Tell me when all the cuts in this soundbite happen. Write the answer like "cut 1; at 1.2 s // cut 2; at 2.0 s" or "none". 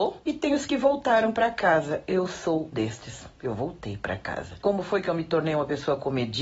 cut 1; at 2.7 s // cut 2; at 3.4 s